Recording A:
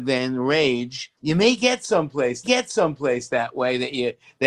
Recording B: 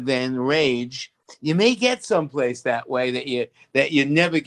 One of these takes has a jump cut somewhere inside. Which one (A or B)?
A